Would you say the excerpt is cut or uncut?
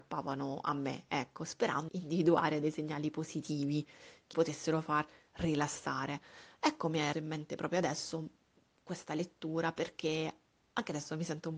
cut